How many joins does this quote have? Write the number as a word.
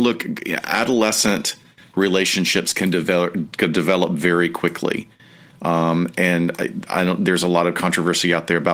zero